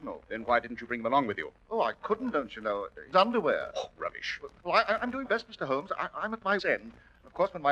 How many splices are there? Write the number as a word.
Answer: four